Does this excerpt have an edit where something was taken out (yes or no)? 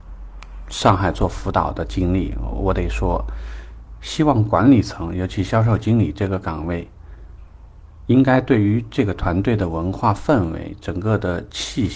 no